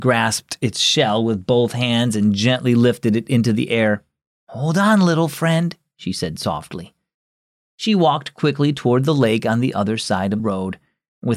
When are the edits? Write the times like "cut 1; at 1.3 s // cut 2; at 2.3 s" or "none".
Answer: cut 1; at 10.4 s